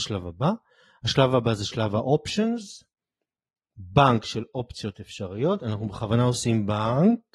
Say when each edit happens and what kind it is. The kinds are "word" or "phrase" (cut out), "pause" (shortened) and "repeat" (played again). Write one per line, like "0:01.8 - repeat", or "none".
none